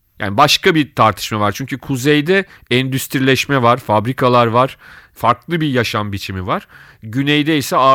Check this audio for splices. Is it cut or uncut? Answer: uncut